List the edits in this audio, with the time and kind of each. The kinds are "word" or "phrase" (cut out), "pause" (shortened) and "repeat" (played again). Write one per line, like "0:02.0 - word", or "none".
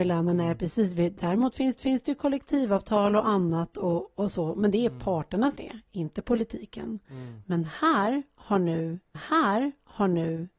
0:01.8 - repeat
0:05.6 - word
0:09.1 - repeat